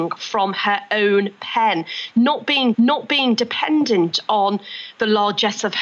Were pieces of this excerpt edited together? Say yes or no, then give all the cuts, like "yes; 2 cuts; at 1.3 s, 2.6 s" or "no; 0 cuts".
yes; 1 cut; at 2.7 s